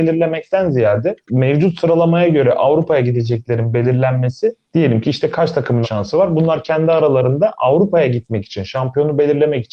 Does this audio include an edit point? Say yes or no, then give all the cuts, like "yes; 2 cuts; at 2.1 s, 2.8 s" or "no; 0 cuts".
yes; 3 cuts; at 1.2 s, 4.6 s, 5.8 s